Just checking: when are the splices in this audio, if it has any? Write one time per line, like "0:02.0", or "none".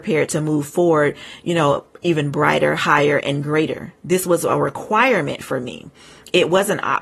none